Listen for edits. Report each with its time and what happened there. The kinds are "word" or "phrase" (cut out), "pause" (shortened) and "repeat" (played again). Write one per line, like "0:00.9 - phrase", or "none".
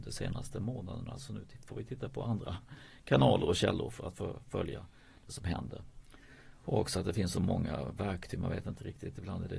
none